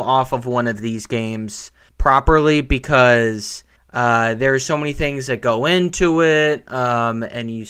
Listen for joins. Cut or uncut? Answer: cut